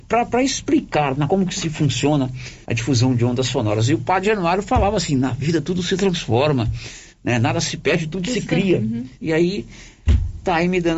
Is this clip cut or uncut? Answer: cut